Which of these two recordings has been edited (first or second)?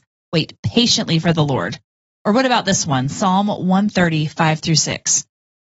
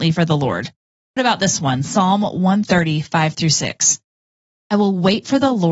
second